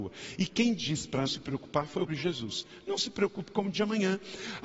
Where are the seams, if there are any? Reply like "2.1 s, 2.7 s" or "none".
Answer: 1.3 s, 2.1 s, 3.7 s